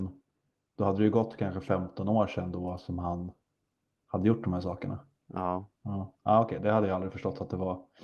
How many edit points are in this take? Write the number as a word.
one